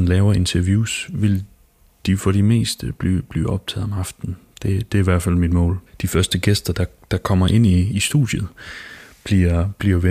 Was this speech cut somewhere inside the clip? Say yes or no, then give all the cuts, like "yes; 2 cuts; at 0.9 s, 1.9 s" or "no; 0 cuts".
no; 0 cuts